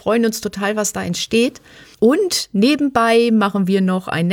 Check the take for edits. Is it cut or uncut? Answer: uncut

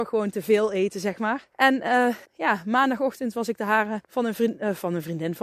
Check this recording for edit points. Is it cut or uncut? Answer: cut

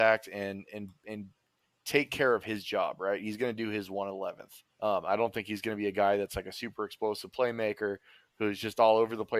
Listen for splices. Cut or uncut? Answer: cut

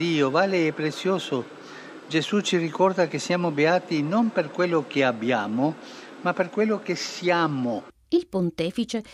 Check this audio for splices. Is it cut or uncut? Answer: uncut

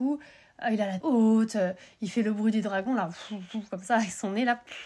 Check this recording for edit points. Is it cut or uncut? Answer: cut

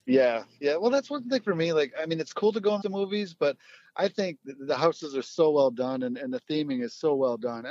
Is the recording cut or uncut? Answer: cut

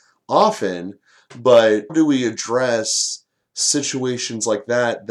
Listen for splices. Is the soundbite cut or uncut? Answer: cut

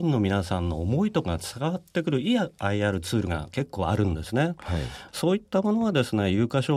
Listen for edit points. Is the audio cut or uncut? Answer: uncut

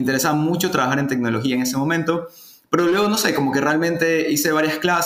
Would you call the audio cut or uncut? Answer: uncut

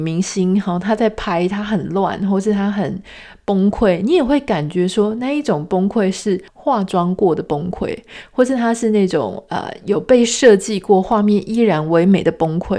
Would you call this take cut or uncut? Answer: cut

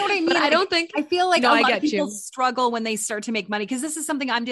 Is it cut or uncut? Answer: uncut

